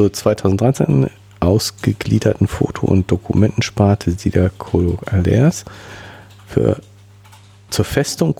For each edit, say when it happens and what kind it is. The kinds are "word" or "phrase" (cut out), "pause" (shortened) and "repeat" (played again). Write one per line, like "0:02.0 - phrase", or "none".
none